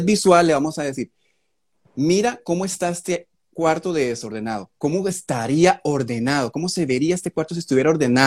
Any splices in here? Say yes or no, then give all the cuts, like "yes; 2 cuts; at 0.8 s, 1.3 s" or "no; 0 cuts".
no; 0 cuts